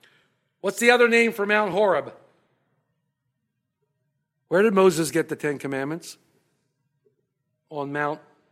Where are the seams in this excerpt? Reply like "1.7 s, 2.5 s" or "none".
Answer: none